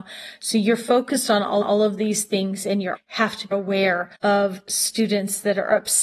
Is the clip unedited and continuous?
no; 4 cuts; at 1.6 s, 2.9 s, 3.5 s, 4.1 s

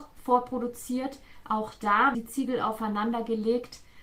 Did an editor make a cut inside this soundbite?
yes; 1 cut; at 2.1 s

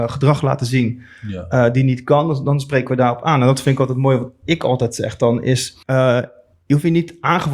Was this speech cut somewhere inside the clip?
yes; 1 cut; at 5.8 s

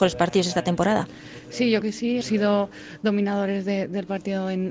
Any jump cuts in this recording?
yes; 2 cuts; at 1.8 s, 2.2 s

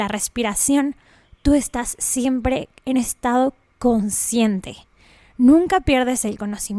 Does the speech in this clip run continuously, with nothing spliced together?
no; 1 cut; at 2.9 s

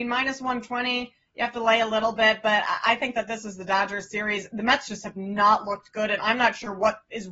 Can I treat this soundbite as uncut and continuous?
yes; 0 cuts

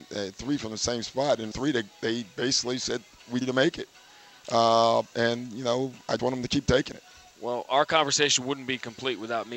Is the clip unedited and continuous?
no; 3 cuts; at 1.5 s, 3.4 s, 6.2 s

